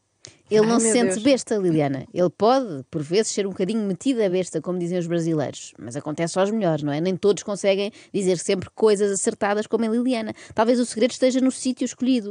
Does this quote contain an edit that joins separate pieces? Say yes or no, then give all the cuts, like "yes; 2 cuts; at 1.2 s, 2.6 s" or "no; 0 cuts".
no; 0 cuts